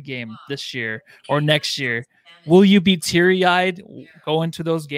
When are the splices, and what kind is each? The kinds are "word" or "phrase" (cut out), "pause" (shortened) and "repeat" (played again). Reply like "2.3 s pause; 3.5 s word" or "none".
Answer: none